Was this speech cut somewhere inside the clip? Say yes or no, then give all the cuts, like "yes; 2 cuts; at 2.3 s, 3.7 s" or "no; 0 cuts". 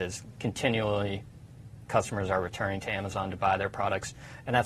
no; 0 cuts